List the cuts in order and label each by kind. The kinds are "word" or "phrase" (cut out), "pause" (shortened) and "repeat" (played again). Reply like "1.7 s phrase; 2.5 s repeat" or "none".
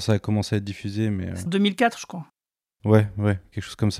1.5 s word